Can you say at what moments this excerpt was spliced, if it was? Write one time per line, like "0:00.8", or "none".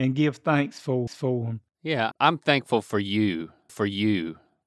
0:01.1
0:02.1
0:03.7